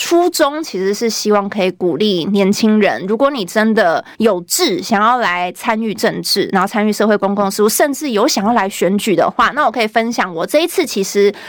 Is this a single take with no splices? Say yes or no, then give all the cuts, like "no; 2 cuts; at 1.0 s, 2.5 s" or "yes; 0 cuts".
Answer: no; 1 cut; at 4.1 s